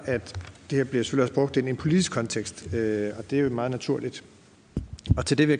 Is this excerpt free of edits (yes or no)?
yes